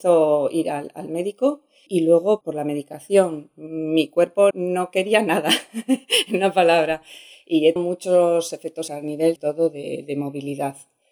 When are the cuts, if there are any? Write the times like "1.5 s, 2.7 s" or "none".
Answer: 1.9 s, 2.4 s, 4.5 s, 7.8 s, 8.9 s, 9.4 s